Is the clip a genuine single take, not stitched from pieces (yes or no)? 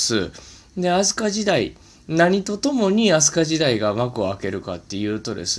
yes